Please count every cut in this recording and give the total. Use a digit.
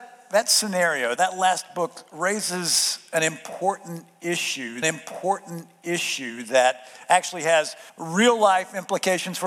3